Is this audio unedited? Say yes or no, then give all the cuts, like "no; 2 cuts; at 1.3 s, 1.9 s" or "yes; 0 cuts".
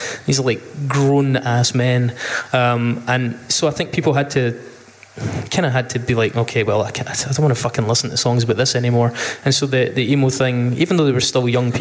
yes; 0 cuts